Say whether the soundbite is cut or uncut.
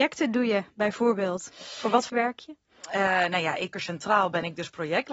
cut